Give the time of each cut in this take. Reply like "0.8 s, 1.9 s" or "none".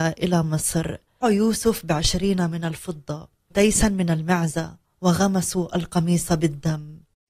1.2 s, 3.5 s

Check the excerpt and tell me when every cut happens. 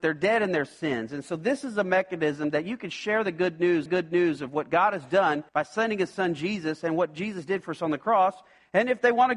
3.9 s, 5.5 s

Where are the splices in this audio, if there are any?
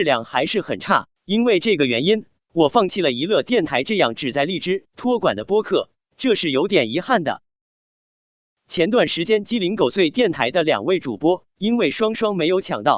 1.1 s

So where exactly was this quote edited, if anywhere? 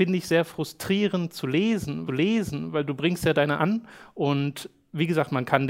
2.1 s, 3.6 s

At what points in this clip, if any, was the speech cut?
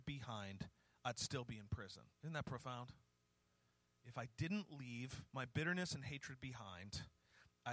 2.1 s, 5.3 s

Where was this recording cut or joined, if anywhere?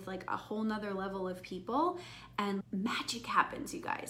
2.6 s

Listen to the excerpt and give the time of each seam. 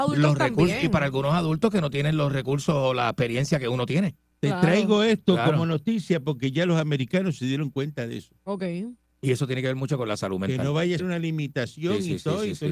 11.0 s

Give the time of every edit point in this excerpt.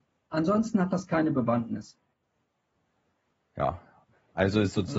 none

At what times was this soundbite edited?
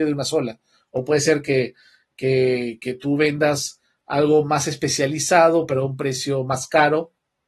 none

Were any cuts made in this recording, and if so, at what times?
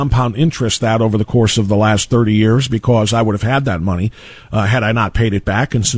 none

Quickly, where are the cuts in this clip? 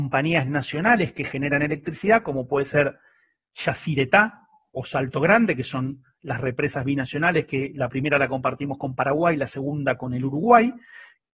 none

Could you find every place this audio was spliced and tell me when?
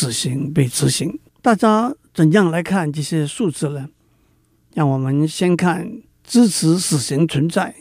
1.3 s, 6.1 s

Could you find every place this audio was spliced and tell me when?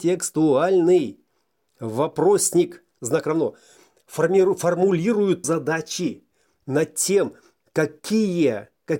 3.0 s, 5.4 s

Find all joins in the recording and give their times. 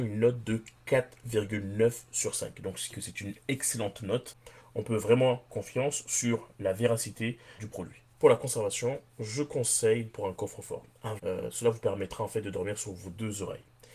2.9 s, 5.5 s, 7.6 s, 8.1 s, 10.1 s, 11.2 s

